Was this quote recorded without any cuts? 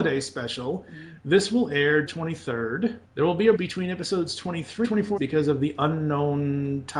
no; 5 cuts; at 2.1 s, 3.1 s, 3.6 s, 4.8 s, 5.2 s

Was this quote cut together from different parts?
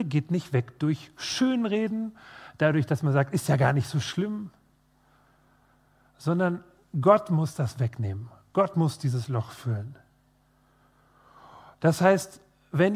no; 0 cuts

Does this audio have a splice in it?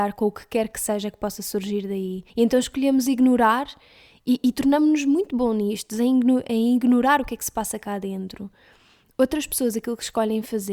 yes; 1 cut; at 2.3 s

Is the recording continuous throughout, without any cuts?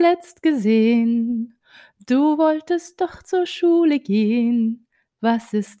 yes; 0 cuts

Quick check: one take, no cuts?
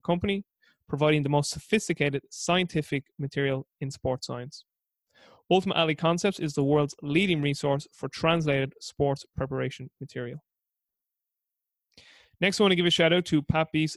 yes; 0 cuts

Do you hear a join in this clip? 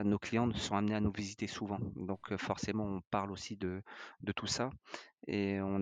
no; 0 cuts

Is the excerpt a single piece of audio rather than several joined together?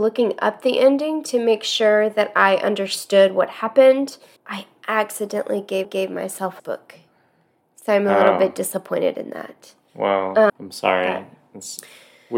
no; 4 cuts; at 4.4 s, 5.8 s, 6.6 s, 10.5 s

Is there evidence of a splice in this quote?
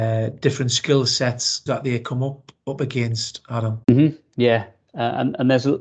yes; 2 cuts; at 1.7 s, 3.8 s

